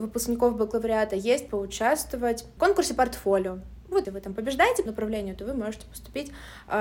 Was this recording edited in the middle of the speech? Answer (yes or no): yes